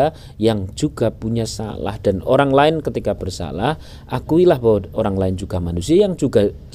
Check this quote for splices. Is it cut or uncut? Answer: uncut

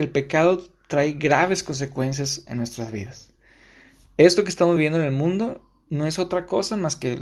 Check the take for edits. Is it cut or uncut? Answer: uncut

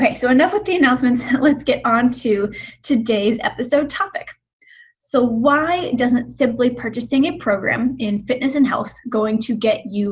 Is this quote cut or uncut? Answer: uncut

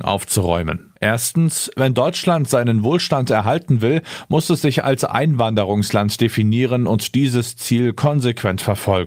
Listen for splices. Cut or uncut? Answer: cut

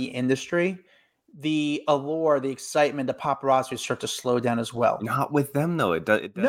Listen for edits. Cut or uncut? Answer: uncut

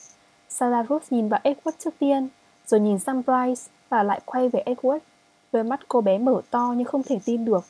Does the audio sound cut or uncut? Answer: uncut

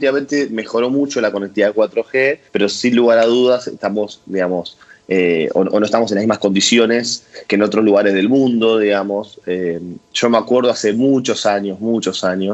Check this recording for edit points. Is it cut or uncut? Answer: cut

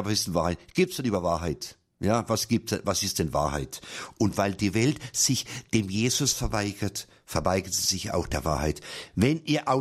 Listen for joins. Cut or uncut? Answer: cut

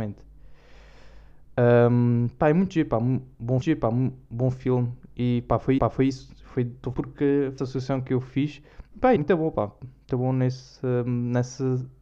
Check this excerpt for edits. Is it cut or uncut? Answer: cut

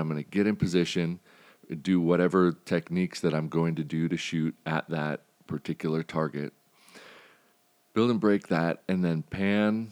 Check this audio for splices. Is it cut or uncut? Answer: uncut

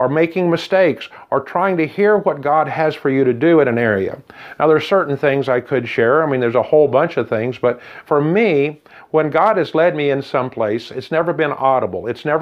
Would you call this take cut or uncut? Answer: uncut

